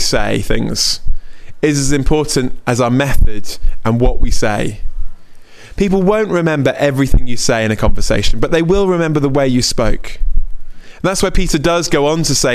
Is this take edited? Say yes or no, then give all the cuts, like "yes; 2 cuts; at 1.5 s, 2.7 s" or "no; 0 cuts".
no; 0 cuts